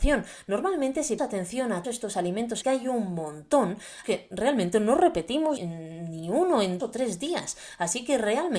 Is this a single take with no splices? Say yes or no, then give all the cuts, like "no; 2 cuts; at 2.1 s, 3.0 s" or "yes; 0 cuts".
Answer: no; 6 cuts; at 1.2 s, 1.8 s, 2.6 s, 4.0 s, 5.6 s, 6.8 s